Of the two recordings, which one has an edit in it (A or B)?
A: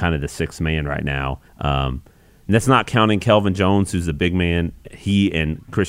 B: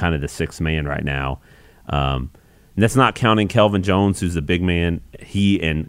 A